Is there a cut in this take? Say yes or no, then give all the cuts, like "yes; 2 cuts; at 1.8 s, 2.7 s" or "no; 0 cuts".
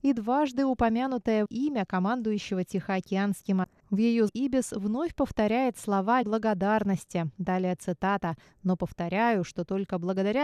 yes; 4 cuts; at 1.5 s, 3.6 s, 4.3 s, 6.2 s